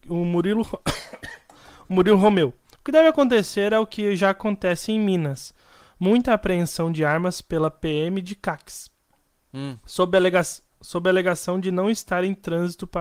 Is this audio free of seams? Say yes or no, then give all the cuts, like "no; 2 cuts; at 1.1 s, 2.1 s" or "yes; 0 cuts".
yes; 0 cuts